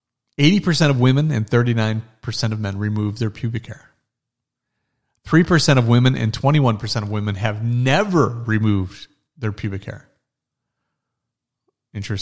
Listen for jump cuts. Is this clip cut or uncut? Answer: uncut